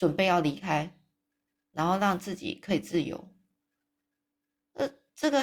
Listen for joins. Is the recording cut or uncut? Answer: uncut